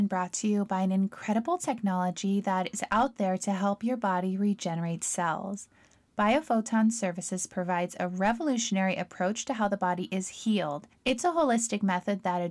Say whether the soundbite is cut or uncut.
uncut